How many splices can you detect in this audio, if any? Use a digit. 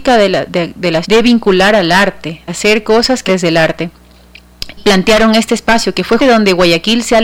5